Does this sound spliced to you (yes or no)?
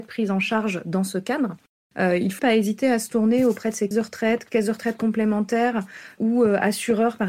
yes